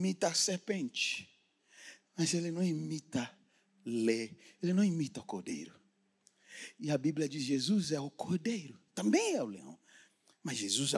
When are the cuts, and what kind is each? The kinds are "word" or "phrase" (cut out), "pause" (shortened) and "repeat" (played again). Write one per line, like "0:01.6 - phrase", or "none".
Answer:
none